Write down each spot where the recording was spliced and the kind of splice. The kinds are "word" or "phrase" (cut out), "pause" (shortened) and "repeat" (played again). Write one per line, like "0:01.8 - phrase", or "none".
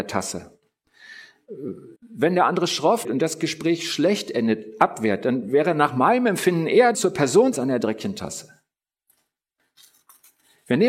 0:02.0 - pause
0:03.0 - word
0:06.9 - phrase
0:07.5 - phrase